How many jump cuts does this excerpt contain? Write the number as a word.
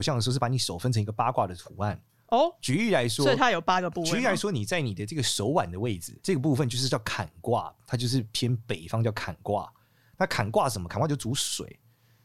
one